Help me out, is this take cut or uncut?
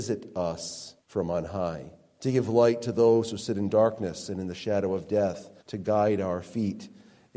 cut